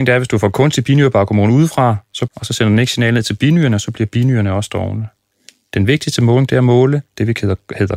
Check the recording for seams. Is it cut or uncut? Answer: cut